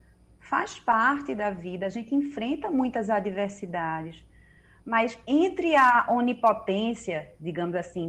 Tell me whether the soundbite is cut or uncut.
uncut